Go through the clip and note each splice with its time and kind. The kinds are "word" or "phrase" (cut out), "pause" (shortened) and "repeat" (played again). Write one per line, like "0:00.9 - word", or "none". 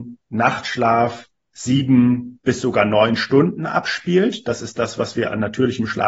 none